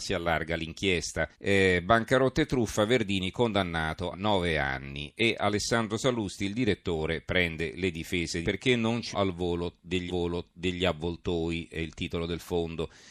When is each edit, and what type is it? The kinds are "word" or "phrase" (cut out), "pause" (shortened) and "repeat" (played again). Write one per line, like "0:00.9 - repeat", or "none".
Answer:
0:01.3 - pause
0:04.1 - word
0:08.4 - phrase
0:09.1 - word
0:10.1 - repeat